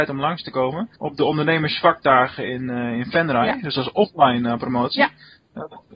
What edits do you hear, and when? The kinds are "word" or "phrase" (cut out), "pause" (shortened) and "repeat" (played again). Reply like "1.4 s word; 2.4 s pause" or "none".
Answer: 1.0 s pause